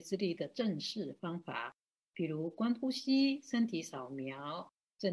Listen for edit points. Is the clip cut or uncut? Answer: uncut